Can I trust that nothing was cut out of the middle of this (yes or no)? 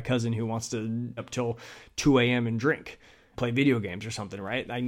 no